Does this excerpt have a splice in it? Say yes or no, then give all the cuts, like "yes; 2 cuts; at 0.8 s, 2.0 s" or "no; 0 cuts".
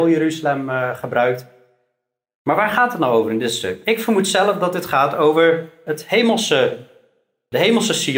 no; 0 cuts